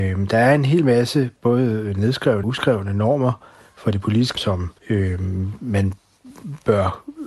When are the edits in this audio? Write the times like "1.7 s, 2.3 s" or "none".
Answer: 2.4 s, 4.3 s, 4.8 s